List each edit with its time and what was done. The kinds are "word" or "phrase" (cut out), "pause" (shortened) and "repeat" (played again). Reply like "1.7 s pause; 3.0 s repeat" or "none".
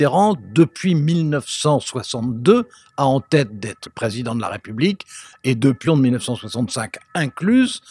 3.9 s word; 5.9 s word